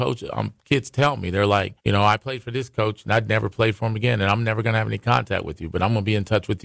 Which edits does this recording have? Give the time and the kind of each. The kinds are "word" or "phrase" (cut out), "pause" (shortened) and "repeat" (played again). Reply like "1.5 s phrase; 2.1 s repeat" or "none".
1.8 s pause